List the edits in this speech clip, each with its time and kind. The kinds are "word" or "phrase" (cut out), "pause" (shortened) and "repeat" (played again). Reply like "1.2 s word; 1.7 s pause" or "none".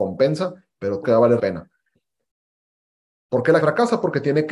1.0 s word; 1.4 s word; 3.6 s word

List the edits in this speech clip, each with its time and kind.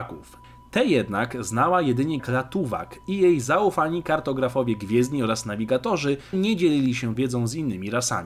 2.2 s word; 6.3 s word; 7.1 s word

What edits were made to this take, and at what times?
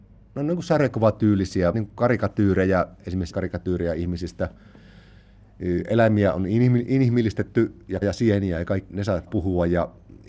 1.7 s word; 3.3 s word; 8.0 s word; 8.9 s word; 9.3 s word

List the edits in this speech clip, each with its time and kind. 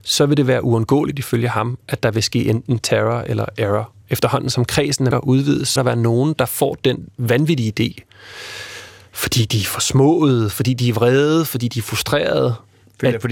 4.0 s pause; 5.1 s word; 5.8 s word

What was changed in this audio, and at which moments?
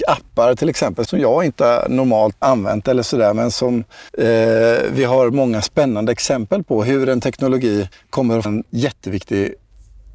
1.0 s word; 2.4 s word; 4.1 s pause; 7.9 s pause; 8.4 s word

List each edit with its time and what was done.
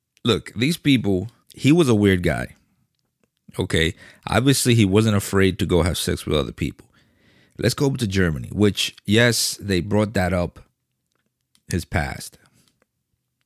1.4 s pause

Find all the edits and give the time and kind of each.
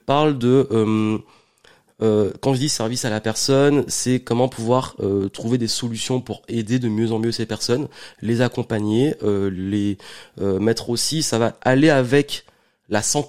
none

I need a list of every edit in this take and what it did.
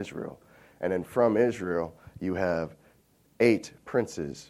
none

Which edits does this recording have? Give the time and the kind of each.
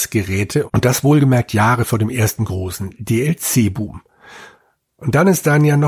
none

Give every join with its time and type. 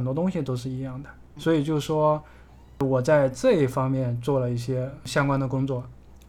1.4 s word

